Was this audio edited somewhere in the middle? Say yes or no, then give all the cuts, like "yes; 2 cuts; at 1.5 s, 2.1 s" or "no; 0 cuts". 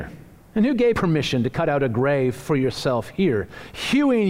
yes; 1 cut; at 0.9 s